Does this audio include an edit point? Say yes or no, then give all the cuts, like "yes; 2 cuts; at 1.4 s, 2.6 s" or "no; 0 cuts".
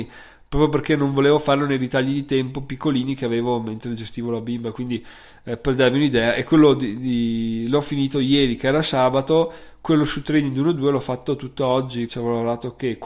yes; 1 cut; at 12.1 s